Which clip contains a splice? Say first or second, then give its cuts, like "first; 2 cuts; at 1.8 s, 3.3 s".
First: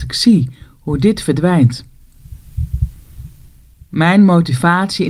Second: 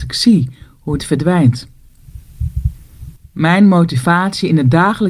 second; 2 cuts; at 1.0 s, 3.2 s